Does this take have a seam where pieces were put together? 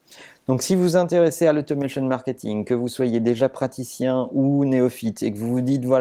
no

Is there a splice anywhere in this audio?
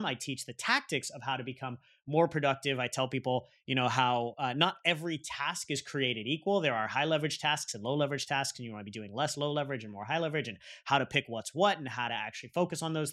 no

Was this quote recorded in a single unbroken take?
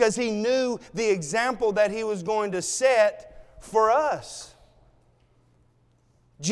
yes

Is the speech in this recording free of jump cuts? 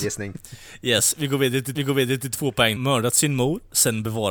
no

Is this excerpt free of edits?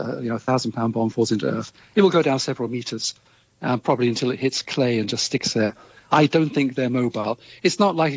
yes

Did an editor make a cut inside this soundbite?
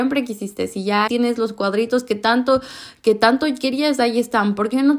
yes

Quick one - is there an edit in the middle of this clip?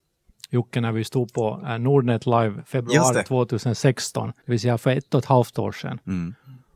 yes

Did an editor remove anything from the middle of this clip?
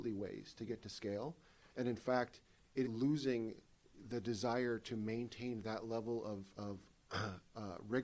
yes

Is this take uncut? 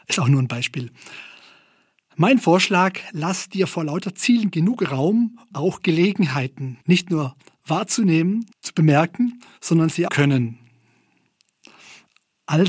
no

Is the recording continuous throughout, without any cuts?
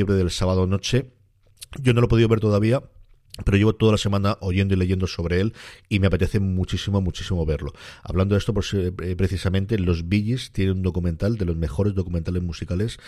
yes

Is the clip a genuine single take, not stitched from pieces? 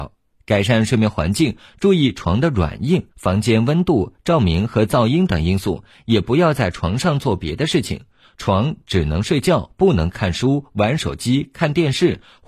no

